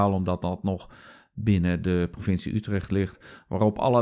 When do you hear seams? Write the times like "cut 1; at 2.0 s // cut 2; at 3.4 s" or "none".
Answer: none